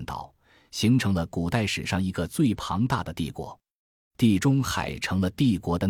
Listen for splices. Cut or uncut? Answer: uncut